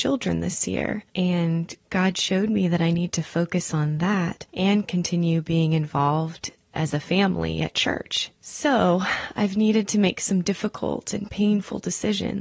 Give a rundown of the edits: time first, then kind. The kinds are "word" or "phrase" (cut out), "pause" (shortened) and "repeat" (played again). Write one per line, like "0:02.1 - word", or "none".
0:01.1 - pause
0:04.5 - pause
0:08.4 - pause